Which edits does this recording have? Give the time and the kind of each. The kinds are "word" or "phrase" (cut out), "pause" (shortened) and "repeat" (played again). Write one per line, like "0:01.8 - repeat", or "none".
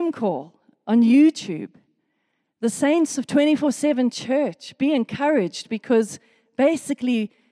none